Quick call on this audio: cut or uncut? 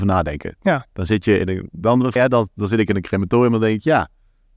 cut